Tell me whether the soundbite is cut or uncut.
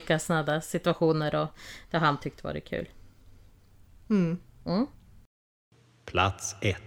uncut